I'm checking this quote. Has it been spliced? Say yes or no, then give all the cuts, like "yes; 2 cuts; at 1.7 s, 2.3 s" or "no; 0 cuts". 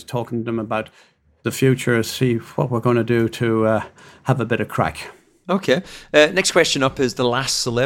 no; 0 cuts